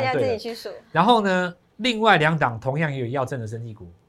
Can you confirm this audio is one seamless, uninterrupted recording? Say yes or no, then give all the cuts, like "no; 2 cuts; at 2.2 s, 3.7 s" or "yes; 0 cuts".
no; 1 cut; at 1.6 s